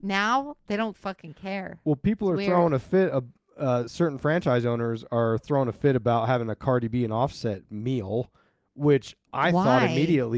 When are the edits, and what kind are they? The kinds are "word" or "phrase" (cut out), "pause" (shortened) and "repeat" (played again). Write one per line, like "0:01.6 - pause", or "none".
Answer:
none